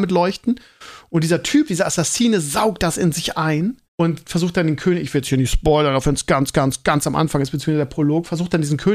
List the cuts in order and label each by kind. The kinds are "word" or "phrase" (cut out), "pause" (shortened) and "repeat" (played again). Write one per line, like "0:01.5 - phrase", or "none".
0:03.8 - pause

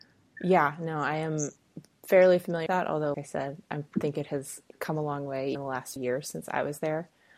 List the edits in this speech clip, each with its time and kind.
0:02.7 - word
0:03.1 - word
0:05.5 - word
0:06.0 - word

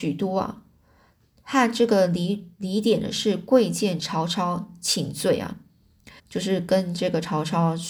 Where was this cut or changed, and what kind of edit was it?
0:06.2 - pause

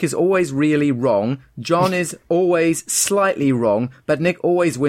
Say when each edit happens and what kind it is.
0:02.2 - pause

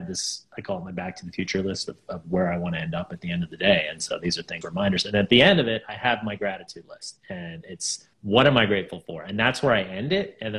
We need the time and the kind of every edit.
0:04.6 - word
0:08.1 - pause

